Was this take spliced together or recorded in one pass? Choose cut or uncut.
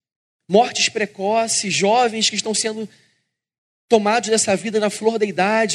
uncut